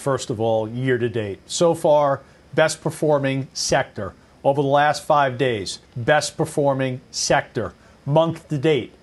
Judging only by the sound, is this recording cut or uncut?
cut